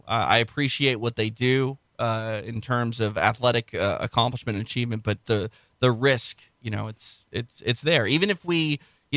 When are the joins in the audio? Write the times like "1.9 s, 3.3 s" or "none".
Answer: 5.2 s